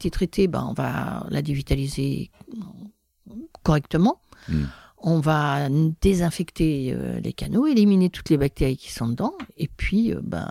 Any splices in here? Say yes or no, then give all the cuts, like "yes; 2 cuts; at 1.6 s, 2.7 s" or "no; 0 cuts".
no; 0 cuts